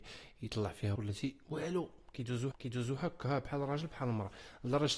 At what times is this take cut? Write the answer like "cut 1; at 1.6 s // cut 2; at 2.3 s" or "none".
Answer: cut 1; at 1.0 s // cut 2; at 2.5 s